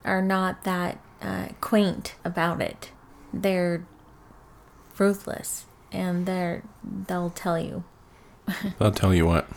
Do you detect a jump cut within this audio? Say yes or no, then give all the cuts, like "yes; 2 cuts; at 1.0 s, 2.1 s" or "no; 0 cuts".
yes; 2 cuts; at 2.2 s, 3.1 s